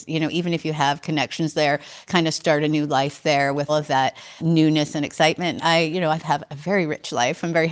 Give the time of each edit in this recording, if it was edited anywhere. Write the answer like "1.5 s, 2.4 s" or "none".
2.1 s, 3.7 s, 4.4 s, 5.6 s